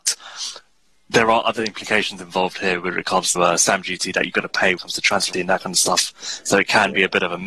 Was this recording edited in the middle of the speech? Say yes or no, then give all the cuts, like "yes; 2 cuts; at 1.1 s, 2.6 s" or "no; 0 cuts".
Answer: yes; 3 cuts; at 3.4 s, 4.8 s, 5.3 s